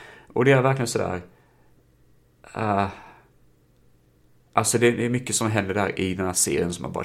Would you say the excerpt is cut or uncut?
uncut